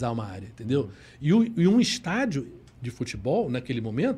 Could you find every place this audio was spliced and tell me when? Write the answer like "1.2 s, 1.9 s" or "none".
none